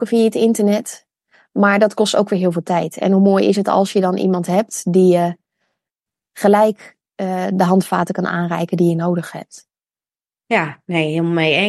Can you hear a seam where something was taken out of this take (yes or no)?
no